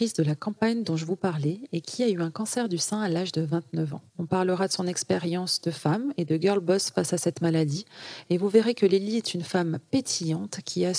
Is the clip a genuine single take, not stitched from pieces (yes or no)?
no